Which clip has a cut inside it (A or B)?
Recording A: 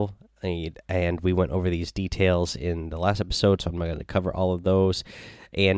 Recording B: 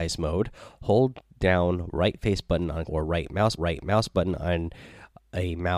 B